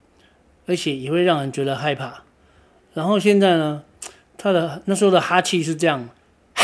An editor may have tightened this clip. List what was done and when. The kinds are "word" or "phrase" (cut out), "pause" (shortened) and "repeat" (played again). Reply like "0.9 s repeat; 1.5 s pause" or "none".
none